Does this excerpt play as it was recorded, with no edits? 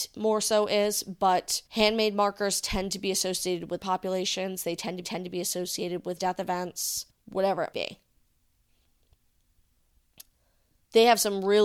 no; 6 cuts; at 1.7 s, 3.8 s, 5.0 s, 6.2 s, 7.1 s, 7.7 s

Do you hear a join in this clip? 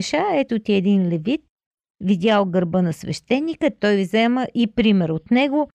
no; 0 cuts

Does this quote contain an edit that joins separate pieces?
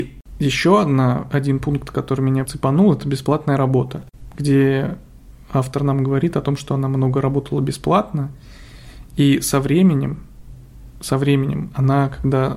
yes; 1 cut; at 2.5 s

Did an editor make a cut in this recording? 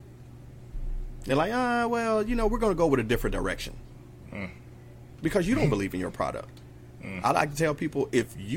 no; 0 cuts

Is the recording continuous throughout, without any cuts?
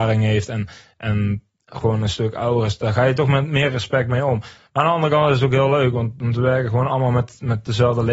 yes; 0 cuts

